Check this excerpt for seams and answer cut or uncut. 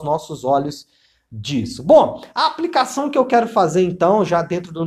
uncut